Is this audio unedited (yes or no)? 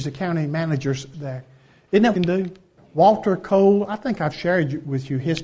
no